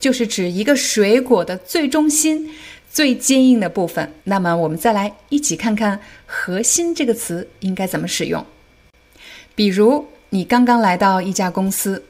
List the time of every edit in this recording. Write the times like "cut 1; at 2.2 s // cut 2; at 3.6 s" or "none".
cut 1; at 4.2 s

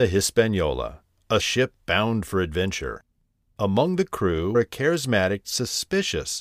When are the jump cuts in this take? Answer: cut 1; at 1.4 s // cut 2; at 4.5 s // cut 3; at 5.4 s

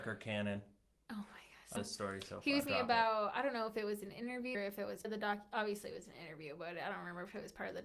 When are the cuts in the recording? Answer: cut 1; at 1.8 s // cut 2; at 2.7 s // cut 3; at 4.5 s // cut 4; at 5.0 s

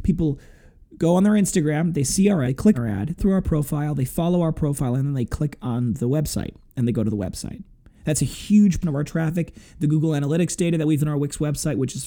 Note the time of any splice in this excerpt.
cut 1; at 2.4 s // cut 2; at 2.7 s // cut 3; at 3.2 s // cut 4; at 8.8 s // cut 5; at 11.0 s

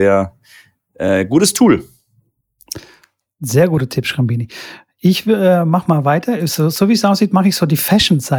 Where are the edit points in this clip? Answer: none

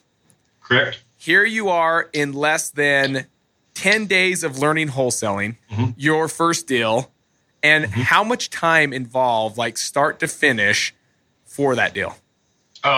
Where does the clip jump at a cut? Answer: cut 1; at 5.6 s

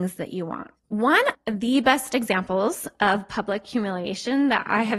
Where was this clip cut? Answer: cut 1; at 1.3 s

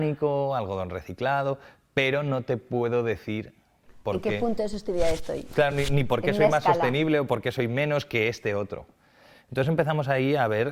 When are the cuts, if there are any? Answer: none

